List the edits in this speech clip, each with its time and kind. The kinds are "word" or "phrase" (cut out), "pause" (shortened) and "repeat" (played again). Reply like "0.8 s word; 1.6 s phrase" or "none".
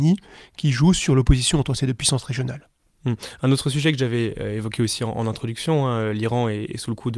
none